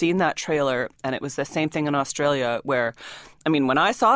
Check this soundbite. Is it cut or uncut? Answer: uncut